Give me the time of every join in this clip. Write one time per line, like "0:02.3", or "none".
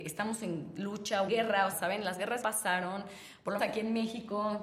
0:01.3
0:01.7
0:02.4
0:03.6